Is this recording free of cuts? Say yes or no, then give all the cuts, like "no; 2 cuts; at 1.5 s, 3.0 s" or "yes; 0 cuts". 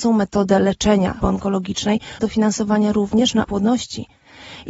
no; 3 cuts; at 1.2 s, 2.2 s, 3.4 s